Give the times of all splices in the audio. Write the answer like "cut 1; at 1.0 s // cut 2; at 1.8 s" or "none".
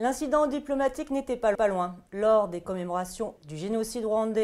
cut 1; at 1.5 s // cut 2; at 3.4 s